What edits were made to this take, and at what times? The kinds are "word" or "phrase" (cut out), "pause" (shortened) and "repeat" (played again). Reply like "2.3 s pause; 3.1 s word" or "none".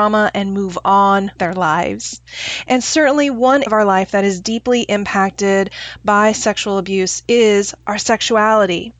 1.4 s word; 3.7 s word

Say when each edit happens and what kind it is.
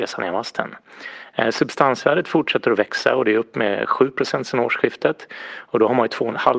none

